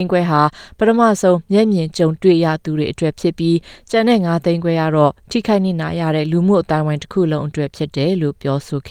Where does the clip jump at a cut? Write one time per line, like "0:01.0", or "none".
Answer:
none